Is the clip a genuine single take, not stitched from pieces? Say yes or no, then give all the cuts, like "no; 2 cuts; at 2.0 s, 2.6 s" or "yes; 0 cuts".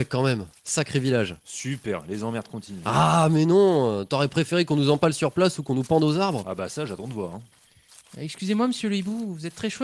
yes; 0 cuts